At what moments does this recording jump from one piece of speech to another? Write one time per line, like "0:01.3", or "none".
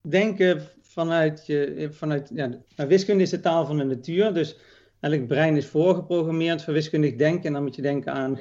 0:02.6